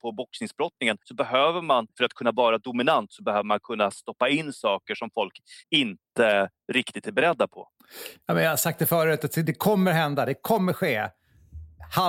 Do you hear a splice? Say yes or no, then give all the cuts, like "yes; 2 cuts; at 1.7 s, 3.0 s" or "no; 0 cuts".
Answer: yes; 3 cuts; at 1.0 s, 1.9 s, 5.6 s